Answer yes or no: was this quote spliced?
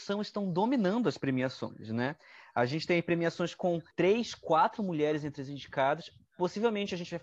yes